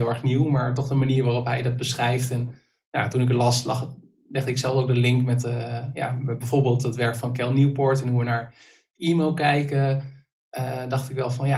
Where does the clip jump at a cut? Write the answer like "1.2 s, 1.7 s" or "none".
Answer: 5.4 s